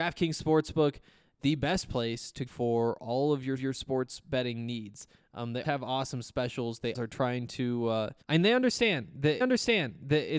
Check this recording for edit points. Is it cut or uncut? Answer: cut